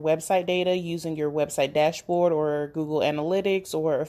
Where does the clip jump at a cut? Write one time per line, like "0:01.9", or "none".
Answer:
none